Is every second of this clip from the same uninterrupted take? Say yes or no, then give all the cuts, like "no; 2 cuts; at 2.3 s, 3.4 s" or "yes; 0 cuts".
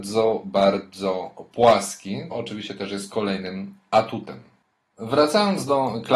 no; 1 cut; at 2.3 s